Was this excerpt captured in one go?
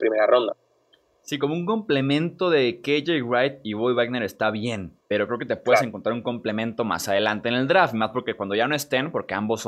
no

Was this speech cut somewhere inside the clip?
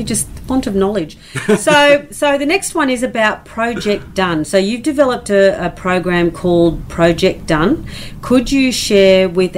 no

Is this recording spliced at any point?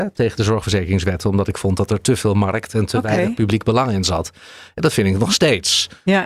no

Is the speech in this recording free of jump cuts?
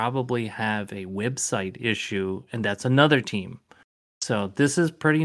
yes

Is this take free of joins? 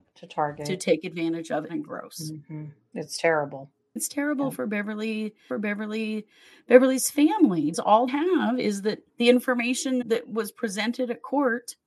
no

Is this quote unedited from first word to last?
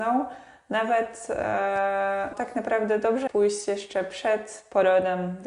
no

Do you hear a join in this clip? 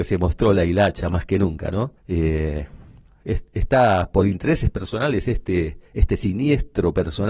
yes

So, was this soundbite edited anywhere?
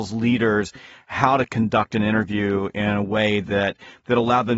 no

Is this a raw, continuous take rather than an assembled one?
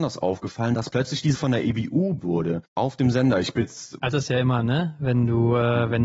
no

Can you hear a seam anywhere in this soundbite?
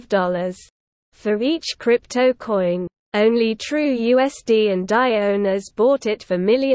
no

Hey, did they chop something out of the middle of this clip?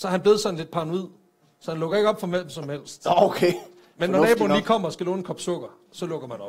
no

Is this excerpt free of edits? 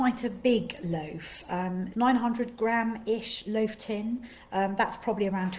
no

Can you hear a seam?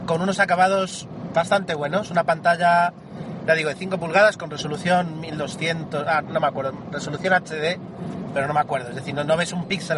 yes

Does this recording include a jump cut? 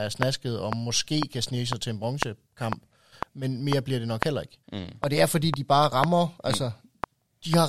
yes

